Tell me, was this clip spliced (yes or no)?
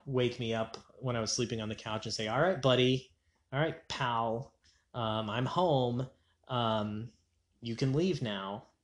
no